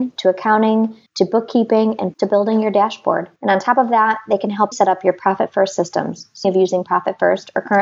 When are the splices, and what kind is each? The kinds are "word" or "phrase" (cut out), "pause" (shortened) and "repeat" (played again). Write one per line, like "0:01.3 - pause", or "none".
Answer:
0:01.1 - pause
0:02.1 - word
0:03.4 - pause
0:04.7 - word
0:06.4 - phrase